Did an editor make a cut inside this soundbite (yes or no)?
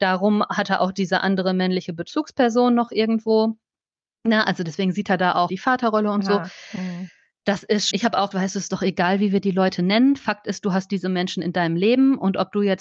yes